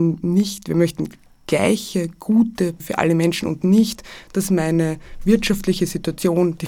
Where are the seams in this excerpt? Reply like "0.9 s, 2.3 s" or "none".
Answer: 2.8 s